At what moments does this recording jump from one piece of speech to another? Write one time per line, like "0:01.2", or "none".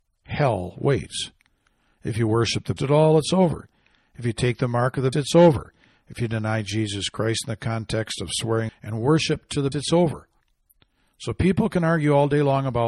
0:02.8
0:05.1
0:08.7
0:09.7

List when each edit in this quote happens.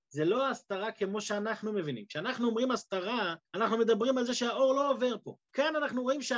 0:03.5
0:05.4

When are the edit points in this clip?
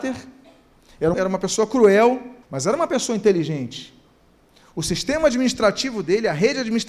0:01.1
0:02.4

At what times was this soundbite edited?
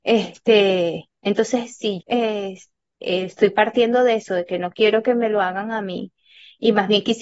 0:02.0

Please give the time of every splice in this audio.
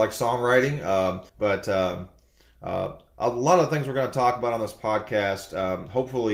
0:01.3

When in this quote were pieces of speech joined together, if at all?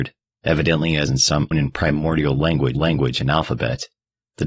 0:01.1
0:01.5
0:02.7

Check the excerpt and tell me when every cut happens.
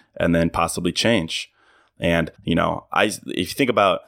0:02.3

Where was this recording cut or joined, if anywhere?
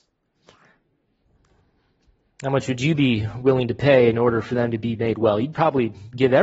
none

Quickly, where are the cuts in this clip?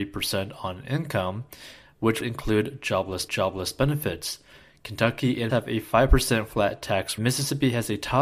0:02.2
0:03.3
0:05.5
0:07.2

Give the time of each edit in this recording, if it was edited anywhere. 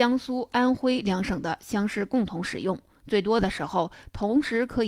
none

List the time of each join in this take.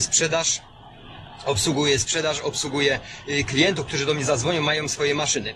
none

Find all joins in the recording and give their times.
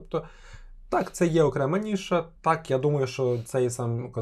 0:02.4

